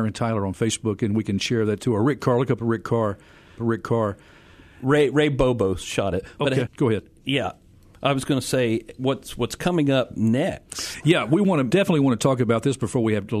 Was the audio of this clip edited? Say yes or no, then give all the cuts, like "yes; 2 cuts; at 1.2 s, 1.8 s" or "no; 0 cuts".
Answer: yes; 2 cuts; at 3.6 s, 6.7 s